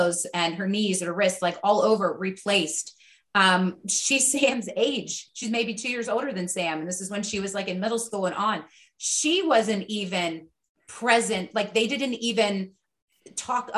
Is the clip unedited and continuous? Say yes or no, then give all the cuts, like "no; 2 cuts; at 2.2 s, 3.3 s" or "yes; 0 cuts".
yes; 0 cuts